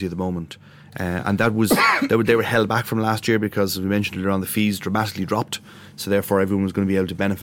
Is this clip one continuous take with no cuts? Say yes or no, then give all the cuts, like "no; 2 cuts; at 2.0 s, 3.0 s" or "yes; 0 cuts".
yes; 0 cuts